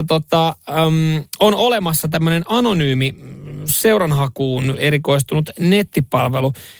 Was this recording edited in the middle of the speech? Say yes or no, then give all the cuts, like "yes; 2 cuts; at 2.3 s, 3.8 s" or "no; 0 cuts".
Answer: no; 0 cuts